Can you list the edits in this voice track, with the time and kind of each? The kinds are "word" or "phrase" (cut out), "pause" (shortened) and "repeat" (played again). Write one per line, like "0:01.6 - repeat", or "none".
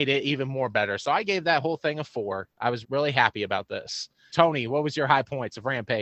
0:02.5 - pause
0:02.8 - word
0:04.3 - word